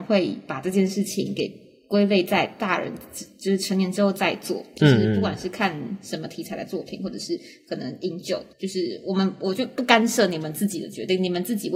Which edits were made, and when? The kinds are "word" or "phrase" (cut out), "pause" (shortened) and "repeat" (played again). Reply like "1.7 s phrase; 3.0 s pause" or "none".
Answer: 8.5 s pause